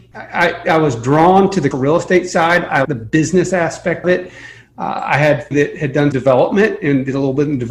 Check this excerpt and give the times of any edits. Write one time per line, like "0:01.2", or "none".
0:01.7
0:02.8
0:04.0
0:05.5
0:06.1